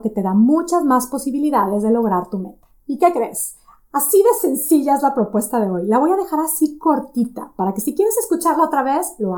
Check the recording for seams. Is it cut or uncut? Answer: uncut